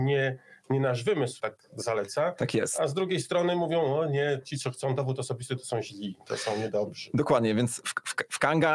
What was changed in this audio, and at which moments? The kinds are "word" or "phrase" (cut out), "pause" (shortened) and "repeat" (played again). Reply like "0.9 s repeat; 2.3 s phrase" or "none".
1.4 s phrase